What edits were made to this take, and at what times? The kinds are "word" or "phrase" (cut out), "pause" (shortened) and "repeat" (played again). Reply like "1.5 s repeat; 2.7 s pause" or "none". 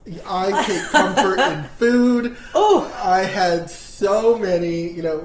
none

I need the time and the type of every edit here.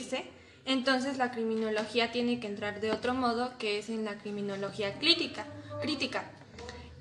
none

